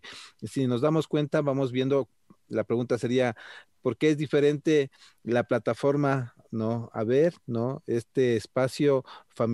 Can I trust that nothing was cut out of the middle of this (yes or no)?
yes